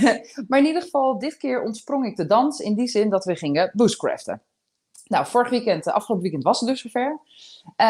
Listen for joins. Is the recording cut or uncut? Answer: uncut